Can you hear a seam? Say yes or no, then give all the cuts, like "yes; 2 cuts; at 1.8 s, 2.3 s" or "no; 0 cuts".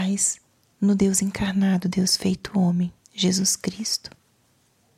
yes; 1 cut; at 3.0 s